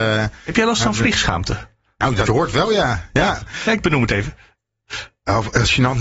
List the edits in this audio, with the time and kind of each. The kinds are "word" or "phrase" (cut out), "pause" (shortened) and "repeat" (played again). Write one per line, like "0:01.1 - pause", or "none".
0:02.3 - word
0:03.8 - word

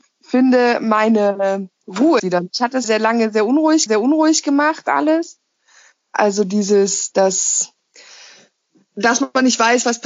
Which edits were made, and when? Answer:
0:02.2 - word
0:02.8 - word
0:03.9 - repeat

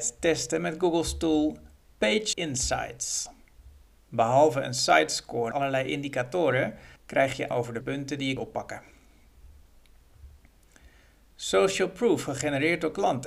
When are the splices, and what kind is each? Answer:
0:02.3 - word
0:05.5 - word
0:07.0 - pause
0:07.5 - word
0:07.8 - word
0:08.4 - word

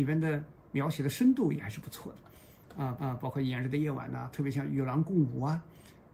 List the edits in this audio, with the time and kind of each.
0:03.0 - repeat

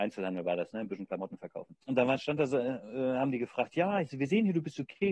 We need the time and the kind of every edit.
0:01.8 - pause

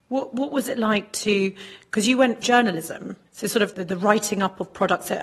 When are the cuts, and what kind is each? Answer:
0:02.4 - word
0:03.3 - pause
0:03.7 - word

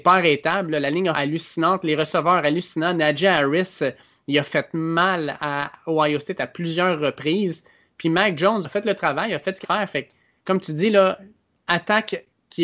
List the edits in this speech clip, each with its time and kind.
0:01.1 - phrase
0:08.6 - word
0:09.6 - phrase

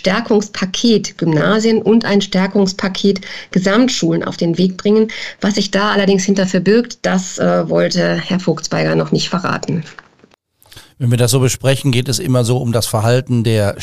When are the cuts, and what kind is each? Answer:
none

